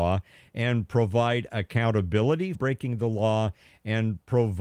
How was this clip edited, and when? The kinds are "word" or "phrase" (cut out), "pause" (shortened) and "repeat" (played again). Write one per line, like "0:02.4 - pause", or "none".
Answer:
0:02.5 - word